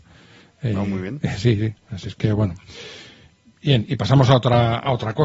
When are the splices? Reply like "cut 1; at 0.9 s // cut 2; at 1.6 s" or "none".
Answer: none